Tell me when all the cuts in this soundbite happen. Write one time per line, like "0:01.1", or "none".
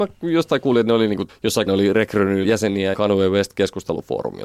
0:01.3
0:01.7
0:02.4
0:02.9